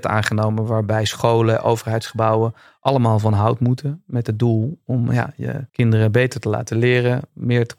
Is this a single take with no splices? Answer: no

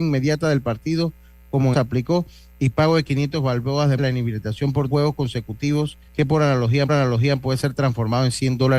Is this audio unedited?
no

